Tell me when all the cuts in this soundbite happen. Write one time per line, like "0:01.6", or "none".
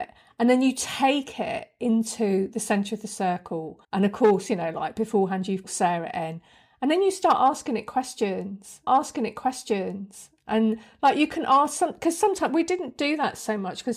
0:03.8
0:05.6
0:08.9

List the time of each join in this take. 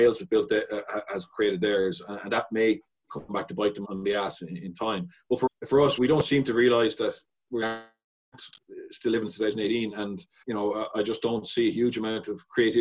0:03.8
0:05.5
0:06.0
0:07.6
0:10.4
0:10.9

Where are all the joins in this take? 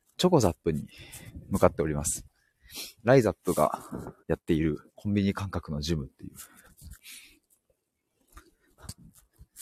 0:03.0
0:04.2
0:04.9

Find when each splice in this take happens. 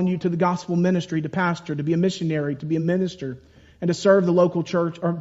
none

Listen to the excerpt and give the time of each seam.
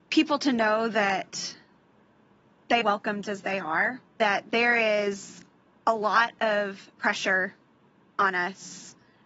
0:02.8
0:03.2
0:04.1
0:06.9

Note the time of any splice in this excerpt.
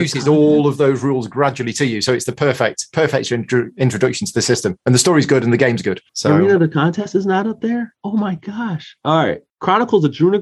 0:06.1
0:09.5

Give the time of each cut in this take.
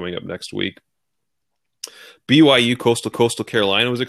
0:03.1

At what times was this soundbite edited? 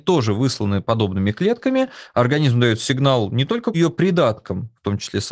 0:03.7

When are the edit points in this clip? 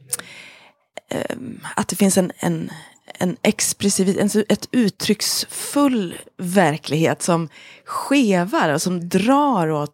none

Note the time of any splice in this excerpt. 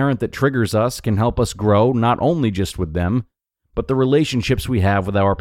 none

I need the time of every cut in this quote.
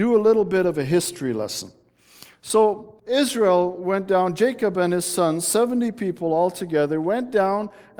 0:03.0

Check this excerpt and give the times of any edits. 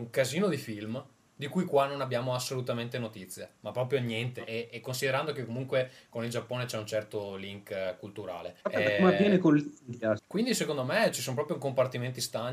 0:08.6
0:10.2
0:11.1

